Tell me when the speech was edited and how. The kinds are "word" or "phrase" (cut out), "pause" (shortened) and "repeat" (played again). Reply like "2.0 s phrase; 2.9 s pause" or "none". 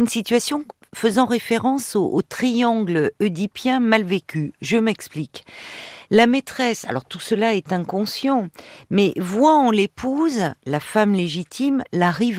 none